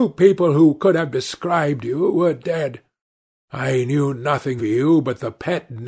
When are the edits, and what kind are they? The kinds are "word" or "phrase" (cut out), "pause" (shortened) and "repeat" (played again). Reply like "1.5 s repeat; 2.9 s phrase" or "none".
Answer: 4.6 s word